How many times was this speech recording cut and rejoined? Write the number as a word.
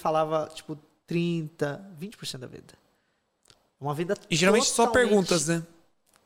zero